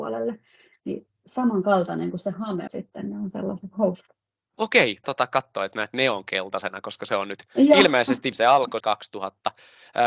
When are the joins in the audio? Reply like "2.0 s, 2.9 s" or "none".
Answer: 2.7 s, 3.7 s, 5.0 s, 5.7 s, 8.3 s, 8.8 s